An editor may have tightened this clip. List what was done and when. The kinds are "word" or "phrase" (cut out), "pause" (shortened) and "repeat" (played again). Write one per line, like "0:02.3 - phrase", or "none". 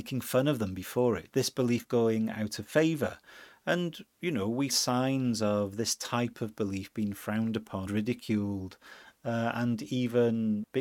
0:01.3 - word
0:04.7 - word
0:07.9 - word